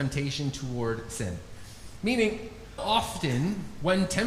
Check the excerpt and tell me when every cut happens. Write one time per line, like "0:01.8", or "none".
0:02.8

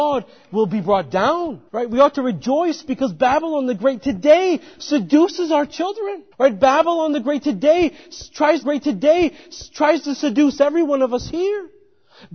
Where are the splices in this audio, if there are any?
0:01.7
0:06.3
0:08.6

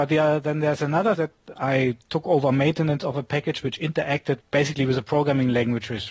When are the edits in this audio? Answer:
0:01.2
0:01.5
0:04.4

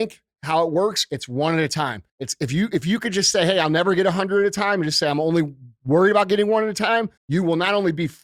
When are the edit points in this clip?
0:02.1
0:07.2

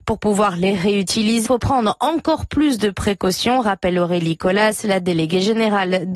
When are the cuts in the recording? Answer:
0:01.5

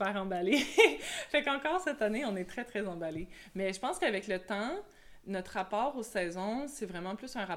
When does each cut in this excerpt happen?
none

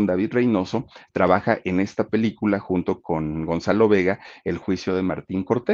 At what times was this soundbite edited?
0:03.0

